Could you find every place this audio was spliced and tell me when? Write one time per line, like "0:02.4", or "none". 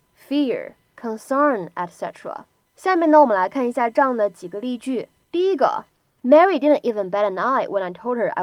0:02.6
0:05.2